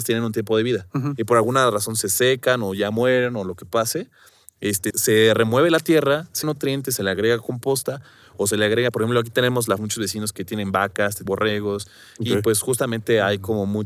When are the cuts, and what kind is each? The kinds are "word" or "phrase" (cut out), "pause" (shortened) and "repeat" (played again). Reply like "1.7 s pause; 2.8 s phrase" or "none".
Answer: 4.9 s word; 6.4 s phrase; 9.8 s phrase; 11.3 s word